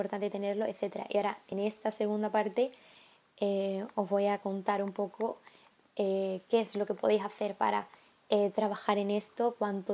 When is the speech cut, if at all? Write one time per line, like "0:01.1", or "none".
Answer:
none